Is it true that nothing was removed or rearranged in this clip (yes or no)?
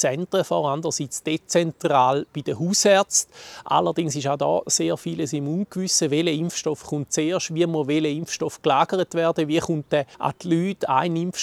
no